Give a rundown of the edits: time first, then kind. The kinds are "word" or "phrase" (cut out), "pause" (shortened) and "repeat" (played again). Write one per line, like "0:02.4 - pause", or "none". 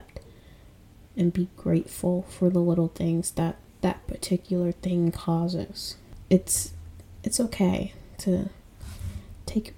none